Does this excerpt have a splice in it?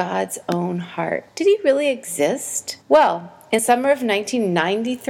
yes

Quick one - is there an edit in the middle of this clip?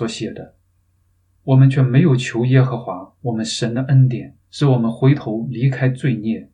yes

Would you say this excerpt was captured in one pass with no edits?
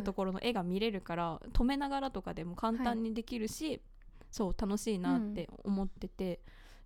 yes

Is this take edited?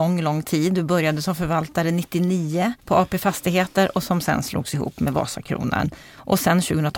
yes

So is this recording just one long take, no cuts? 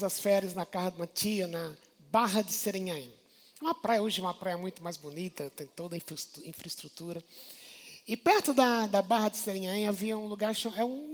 yes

